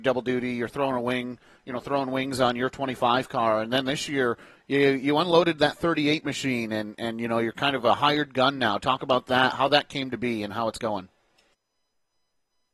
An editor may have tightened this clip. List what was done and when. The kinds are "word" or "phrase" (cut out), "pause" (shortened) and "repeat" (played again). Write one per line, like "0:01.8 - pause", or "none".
none